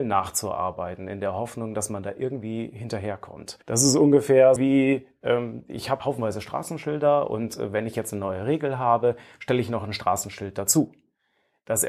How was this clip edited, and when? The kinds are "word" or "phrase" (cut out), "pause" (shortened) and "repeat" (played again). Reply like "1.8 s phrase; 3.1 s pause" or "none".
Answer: 3.6 s pause; 4.6 s word; 6.0 s word